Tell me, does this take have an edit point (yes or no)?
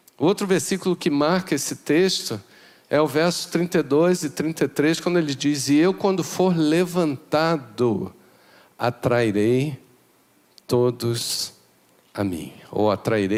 no